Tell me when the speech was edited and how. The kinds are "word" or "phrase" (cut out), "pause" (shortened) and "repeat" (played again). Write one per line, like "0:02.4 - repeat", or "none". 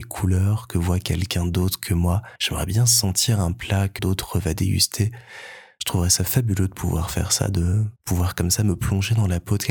0:02.4 - pause
0:04.0 - word
0:08.0 - pause